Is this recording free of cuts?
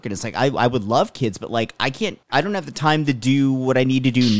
no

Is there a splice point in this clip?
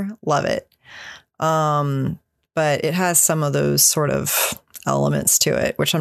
no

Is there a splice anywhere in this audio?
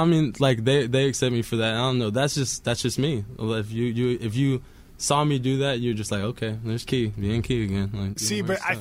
no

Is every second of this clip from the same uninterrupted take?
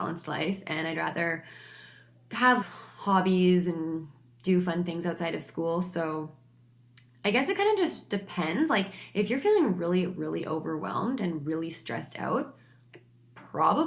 no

